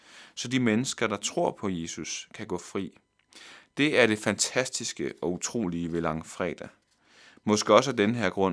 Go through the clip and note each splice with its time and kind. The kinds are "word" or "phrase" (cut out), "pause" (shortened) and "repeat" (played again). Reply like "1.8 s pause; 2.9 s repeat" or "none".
none